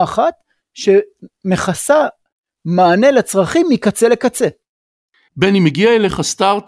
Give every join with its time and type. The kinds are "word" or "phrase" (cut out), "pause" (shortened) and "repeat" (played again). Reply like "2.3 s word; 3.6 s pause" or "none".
none